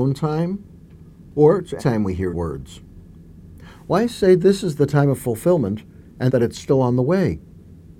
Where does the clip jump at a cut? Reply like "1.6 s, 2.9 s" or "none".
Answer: 1.8 s, 2.3 s, 6.3 s